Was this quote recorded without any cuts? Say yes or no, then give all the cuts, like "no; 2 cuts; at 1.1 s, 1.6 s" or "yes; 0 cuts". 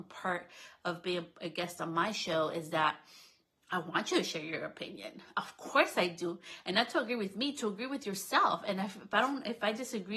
no; 1 cut; at 3.5 s